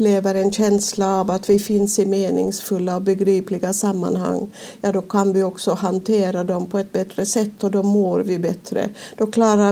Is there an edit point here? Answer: no; 0 cuts

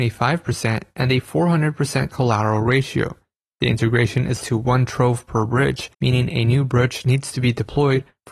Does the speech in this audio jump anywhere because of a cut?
yes; 2 cuts; at 4.4 s, 5.9 s

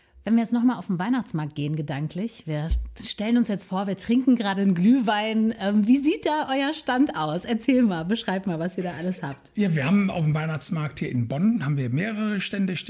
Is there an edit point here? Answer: no; 0 cuts

